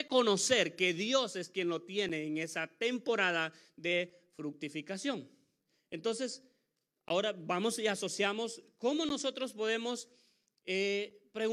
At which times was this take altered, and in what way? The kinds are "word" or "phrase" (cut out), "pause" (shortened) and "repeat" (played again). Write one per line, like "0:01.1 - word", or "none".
none